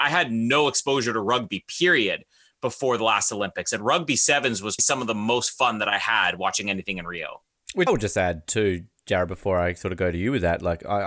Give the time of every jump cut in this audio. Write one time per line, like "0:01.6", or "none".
0:04.8
0:07.9